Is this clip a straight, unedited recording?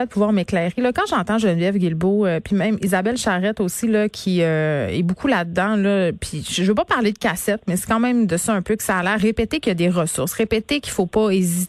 yes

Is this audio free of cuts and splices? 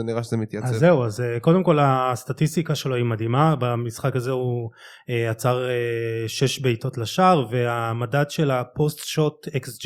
yes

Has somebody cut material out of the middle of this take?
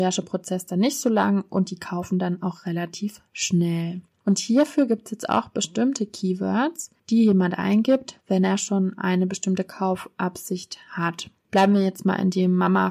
yes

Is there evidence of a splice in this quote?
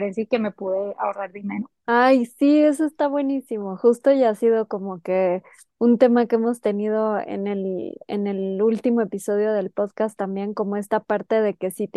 yes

